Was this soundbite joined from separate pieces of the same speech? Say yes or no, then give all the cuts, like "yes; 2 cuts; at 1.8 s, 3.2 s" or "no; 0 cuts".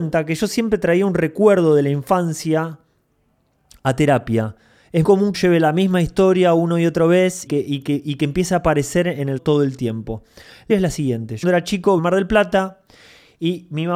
yes; 7 cuts; at 5.0 s, 5.3 s, 7.5 s, 9.4 s, 10.7 s, 11.4 s, 12.0 s